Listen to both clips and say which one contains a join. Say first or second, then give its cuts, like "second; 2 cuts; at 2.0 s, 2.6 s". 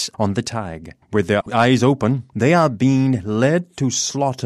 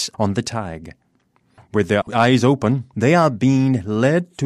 first; 1 cut; at 1.0 s